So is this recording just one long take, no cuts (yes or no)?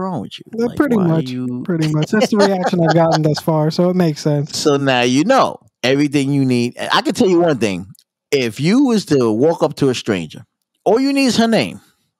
yes